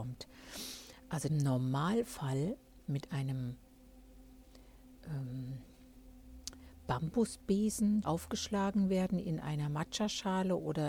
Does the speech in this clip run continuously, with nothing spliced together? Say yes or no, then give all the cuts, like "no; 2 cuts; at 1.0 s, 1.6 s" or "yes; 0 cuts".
no; 2 cuts; at 1.3 s, 8.0 s